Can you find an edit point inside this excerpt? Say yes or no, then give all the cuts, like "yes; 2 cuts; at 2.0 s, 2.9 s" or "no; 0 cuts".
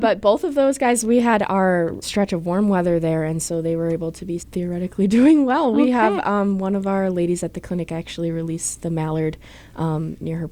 yes; 2 cuts; at 2.0 s, 4.4 s